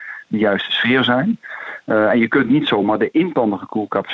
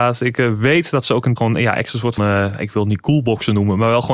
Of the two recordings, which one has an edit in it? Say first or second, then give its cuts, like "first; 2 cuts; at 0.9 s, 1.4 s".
second; 2 cuts; at 1.4 s, 2.2 s